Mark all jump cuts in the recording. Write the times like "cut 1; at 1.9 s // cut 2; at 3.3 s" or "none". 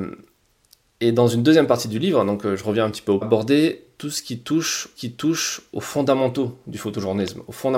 cut 1; at 3.2 s // cut 2; at 5.0 s